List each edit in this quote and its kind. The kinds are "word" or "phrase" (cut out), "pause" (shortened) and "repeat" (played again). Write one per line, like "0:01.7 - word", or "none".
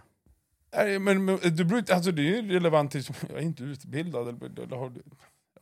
none